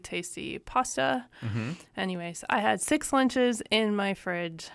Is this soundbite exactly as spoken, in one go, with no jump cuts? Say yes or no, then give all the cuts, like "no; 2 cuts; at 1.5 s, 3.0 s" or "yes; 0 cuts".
yes; 0 cuts